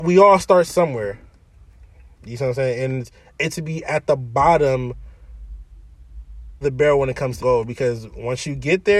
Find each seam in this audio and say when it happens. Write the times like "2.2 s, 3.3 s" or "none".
3.5 s, 6.6 s, 7.4 s